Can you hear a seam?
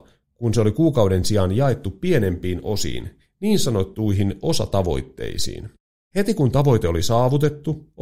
no; 0 cuts

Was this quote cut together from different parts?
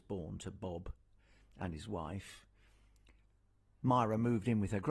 no; 0 cuts

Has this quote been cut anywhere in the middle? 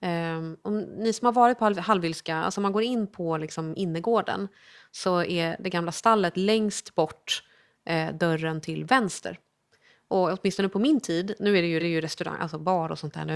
yes; 1 cut; at 11.8 s

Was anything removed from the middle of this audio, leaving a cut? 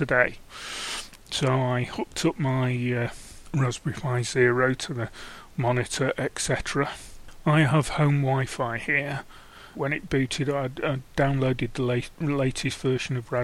yes; 2 cuts; at 9.7 s, 11.1 s

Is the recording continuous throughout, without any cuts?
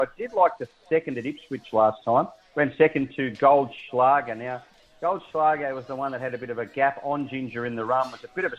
yes; 0 cuts

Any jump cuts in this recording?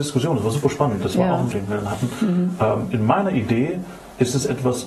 yes; 2 cuts; at 1.5 s, 2.9 s

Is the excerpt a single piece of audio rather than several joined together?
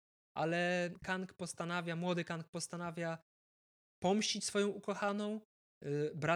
yes; 0 cuts

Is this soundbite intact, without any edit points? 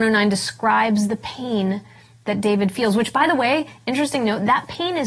yes; 0 cuts

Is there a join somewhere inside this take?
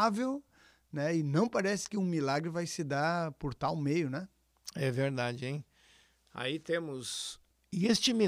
no; 0 cuts

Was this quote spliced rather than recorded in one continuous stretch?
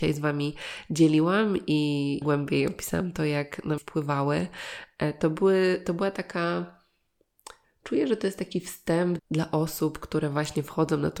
yes; 3 cuts; at 2.2 s, 3.8 s, 9.2 s

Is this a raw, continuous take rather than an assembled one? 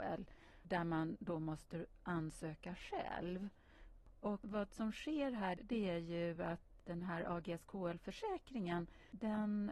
yes; 0 cuts

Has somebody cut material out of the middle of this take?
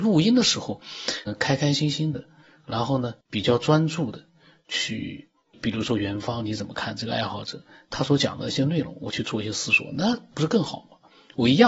yes; 3 cuts; at 1.3 s, 3.2 s, 5.5 s

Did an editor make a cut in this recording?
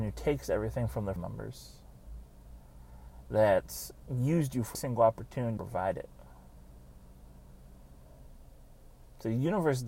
yes; 3 cuts; at 1.2 s, 4.7 s, 5.6 s

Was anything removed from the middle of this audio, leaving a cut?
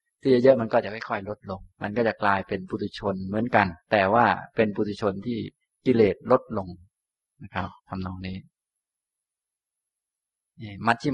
yes; 3 cuts; at 1.7 s, 3.8 s, 7.8 s

